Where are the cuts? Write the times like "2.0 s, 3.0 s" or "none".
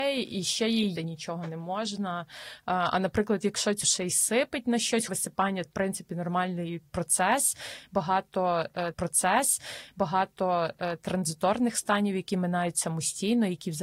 1.0 s, 3.8 s, 5.1 s, 5.7 s, 8.9 s